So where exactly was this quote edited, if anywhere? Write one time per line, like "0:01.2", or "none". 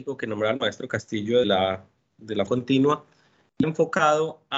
0:01.4
0:02.5
0:03.6

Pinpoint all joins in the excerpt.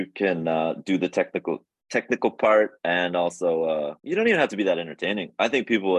0:04.0

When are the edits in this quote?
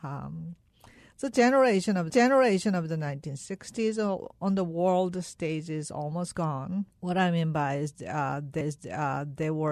0:02.1
0:06.9
0:08.6

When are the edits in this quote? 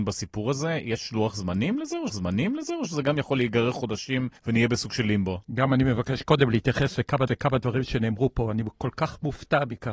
0:02.1
0:04.4
0:05.4
0:07.3

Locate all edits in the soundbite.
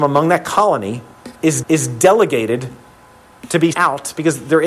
0:01.6
0:03.7

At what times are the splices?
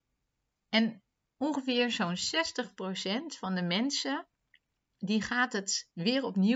none

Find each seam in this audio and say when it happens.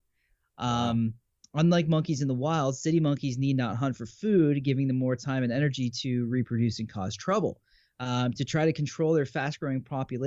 none

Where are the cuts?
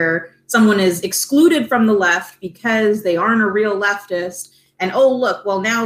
none

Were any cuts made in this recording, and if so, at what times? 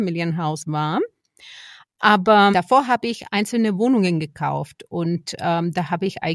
0:02.5

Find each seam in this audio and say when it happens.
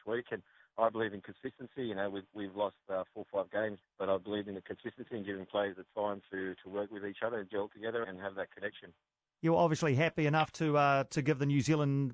0:03.8
0:08.0

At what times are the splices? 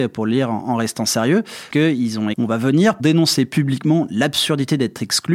0:01.7
0:02.3
0:03.0

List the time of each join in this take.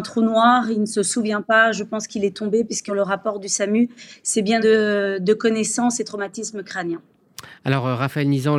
0:02.9
0:04.6

